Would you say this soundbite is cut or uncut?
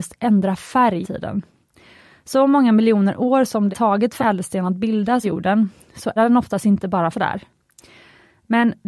cut